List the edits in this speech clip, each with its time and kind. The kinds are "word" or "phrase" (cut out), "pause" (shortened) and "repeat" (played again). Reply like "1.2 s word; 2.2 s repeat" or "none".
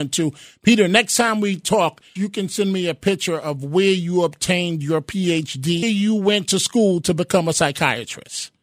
2.2 s word; 5.8 s phrase